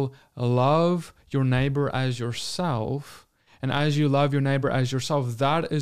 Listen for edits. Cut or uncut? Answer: uncut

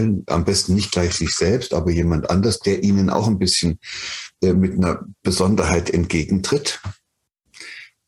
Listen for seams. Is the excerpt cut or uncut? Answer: uncut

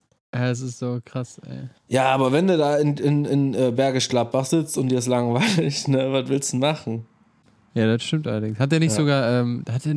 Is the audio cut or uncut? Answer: cut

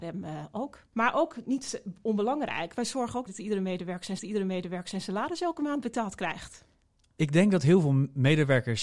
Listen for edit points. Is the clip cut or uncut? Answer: cut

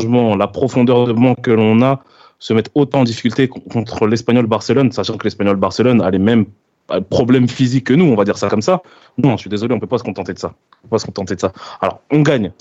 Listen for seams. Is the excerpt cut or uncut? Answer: uncut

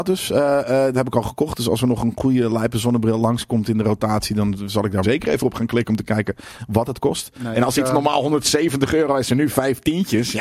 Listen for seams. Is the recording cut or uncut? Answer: cut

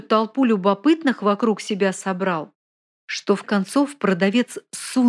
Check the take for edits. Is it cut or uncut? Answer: cut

